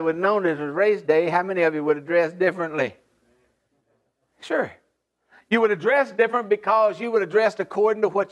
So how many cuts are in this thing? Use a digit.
0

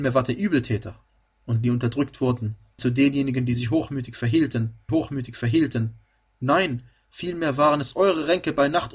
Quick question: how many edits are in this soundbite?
3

